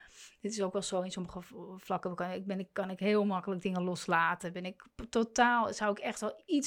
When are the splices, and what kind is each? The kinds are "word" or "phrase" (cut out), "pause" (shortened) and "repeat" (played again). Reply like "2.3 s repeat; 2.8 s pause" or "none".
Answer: none